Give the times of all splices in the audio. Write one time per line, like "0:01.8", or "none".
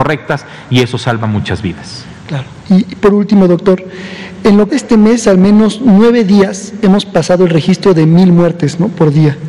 0:04.7